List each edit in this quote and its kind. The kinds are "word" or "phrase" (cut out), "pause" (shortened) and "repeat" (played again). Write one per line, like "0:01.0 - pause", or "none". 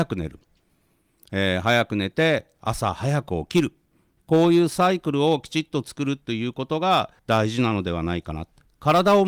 0:07.2 - pause